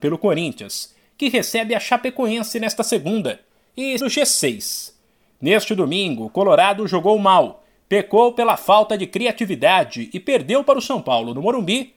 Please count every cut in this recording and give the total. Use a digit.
1